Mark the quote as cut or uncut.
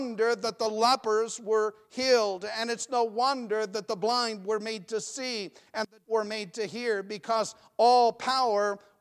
cut